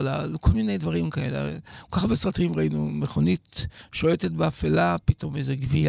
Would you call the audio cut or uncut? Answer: uncut